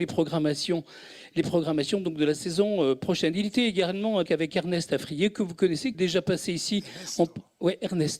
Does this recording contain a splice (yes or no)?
yes